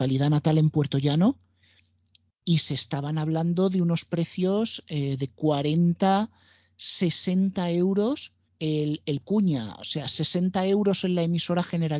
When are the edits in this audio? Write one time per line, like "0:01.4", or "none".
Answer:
0:08.5
0:09.2